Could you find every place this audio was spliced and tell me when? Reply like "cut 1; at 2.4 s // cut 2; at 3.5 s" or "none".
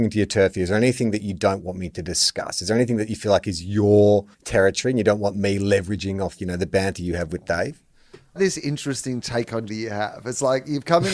cut 1; at 4.3 s // cut 2; at 6.4 s // cut 3; at 8.4 s // cut 4; at 9.7 s